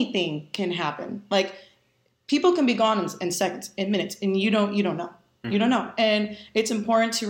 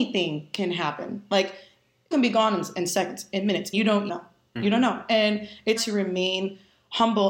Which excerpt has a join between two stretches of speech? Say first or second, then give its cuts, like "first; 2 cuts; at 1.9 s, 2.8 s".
second; 4 cuts; at 2.1 s, 3.7 s, 4.1 s, 5.8 s